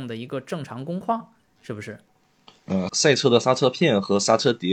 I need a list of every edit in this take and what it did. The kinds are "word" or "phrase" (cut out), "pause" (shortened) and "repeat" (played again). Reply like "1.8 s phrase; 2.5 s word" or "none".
2.9 s phrase